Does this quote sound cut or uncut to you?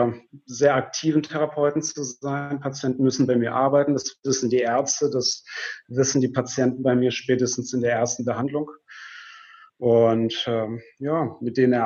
uncut